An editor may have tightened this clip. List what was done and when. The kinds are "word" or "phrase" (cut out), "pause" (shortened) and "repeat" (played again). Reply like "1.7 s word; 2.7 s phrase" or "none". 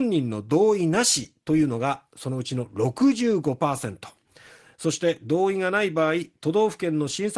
none